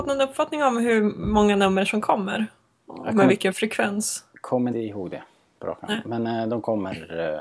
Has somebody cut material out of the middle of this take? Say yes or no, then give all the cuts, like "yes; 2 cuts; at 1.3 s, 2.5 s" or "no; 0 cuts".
yes; 1 cut; at 4.7 s